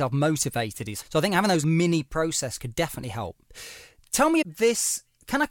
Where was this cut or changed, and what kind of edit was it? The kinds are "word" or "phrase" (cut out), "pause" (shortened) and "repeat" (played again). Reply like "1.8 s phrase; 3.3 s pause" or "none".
1.0 s word; 1.6 s word; 2.6 s word; 4.4 s word